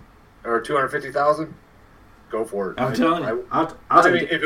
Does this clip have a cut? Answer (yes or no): no